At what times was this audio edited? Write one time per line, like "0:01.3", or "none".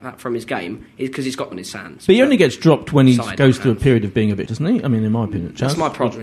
0:01.5
0:04.5